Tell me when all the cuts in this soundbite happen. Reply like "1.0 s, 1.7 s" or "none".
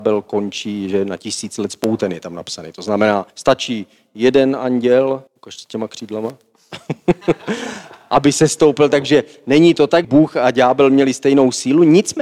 3.3 s, 5.3 s, 10.0 s